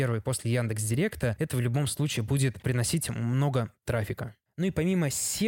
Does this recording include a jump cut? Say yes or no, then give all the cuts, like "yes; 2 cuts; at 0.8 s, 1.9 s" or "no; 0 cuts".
no; 0 cuts